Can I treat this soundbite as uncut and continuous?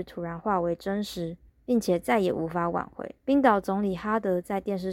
no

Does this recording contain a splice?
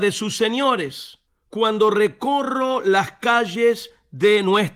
yes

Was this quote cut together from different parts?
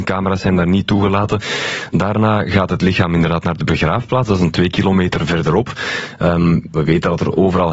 yes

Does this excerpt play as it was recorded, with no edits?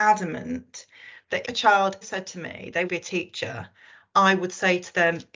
no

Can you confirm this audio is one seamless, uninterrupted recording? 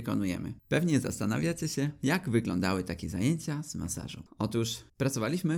yes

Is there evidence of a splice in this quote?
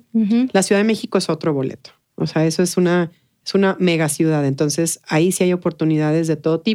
no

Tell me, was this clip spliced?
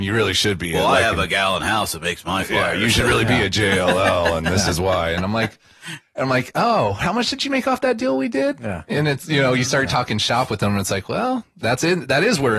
no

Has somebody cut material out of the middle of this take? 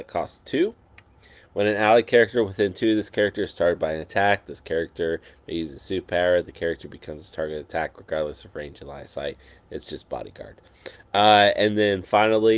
no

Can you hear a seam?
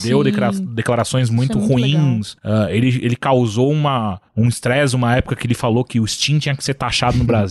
yes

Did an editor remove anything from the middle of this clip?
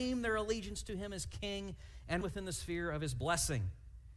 yes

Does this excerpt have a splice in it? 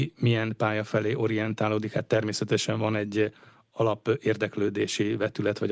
no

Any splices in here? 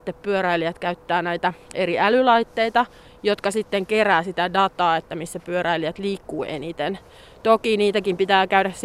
no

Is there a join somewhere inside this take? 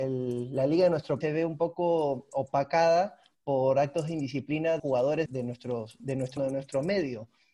yes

